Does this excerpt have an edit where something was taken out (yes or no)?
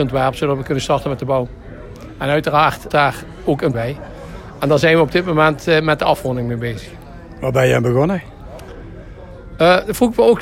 yes